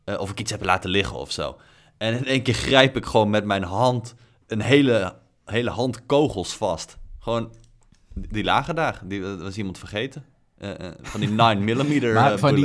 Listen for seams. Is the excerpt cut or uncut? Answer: uncut